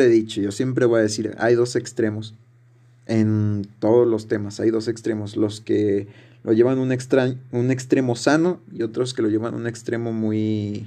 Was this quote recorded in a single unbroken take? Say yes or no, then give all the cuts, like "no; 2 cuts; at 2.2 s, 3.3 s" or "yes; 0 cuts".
yes; 0 cuts